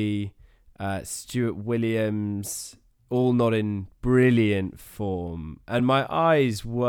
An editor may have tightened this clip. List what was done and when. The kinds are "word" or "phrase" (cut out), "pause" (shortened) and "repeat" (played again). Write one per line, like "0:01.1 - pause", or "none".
none